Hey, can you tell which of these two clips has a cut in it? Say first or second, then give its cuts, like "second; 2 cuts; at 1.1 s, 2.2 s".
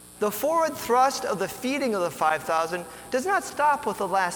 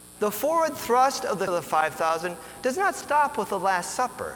second; 1 cut; at 1.5 s